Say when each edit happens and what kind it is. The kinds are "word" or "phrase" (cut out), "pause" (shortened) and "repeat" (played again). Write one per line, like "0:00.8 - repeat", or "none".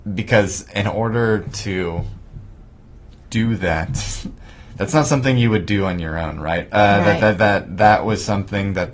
none